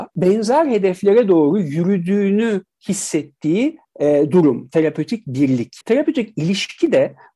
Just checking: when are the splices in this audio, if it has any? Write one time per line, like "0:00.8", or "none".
0:05.8

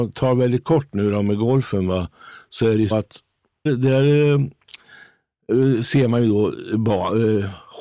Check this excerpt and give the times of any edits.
0:02.9
0:03.7

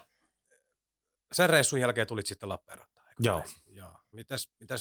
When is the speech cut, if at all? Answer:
none

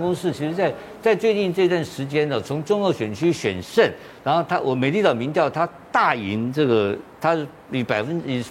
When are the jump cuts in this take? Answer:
none

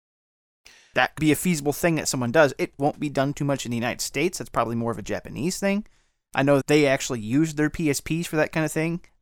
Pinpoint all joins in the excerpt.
0:01.2
0:02.8
0:06.6

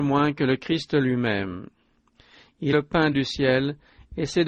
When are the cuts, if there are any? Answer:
0:02.7
0:03.1

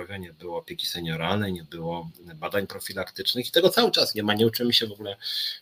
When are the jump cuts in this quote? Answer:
none

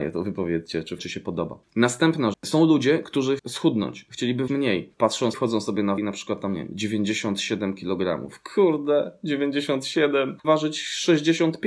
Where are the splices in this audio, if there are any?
0:01.0
0:02.3
0:03.4
0:04.5
0:05.3
0:06.0
0:10.4

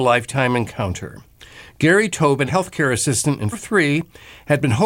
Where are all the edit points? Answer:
0:02.5
0:03.5

